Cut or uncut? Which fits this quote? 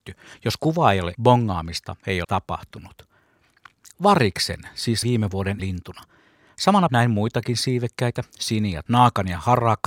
cut